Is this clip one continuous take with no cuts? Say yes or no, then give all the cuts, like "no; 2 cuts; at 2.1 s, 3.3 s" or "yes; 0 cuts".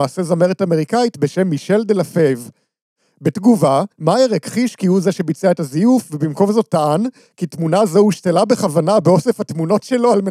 no; 1 cut; at 3.9 s